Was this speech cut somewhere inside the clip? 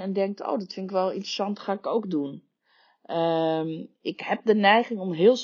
yes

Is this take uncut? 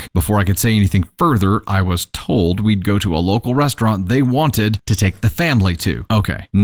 yes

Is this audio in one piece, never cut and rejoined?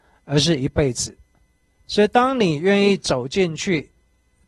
yes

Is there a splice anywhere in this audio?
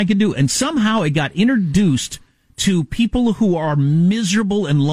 no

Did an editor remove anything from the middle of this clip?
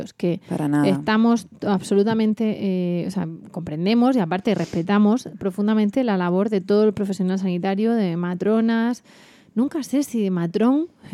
no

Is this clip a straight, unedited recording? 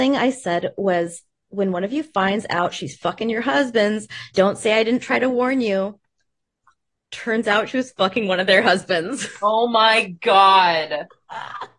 no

